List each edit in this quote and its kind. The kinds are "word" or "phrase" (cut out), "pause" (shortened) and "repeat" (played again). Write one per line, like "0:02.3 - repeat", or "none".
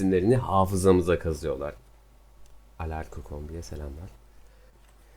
none